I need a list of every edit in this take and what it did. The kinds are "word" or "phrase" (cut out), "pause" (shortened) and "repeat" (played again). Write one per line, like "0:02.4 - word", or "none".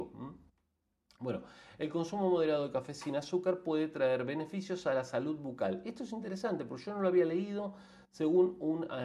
none